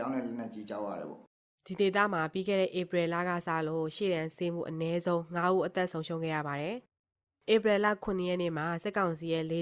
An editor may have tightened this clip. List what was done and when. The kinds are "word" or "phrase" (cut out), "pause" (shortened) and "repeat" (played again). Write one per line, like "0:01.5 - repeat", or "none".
none